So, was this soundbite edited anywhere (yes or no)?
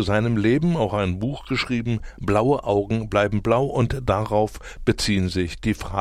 no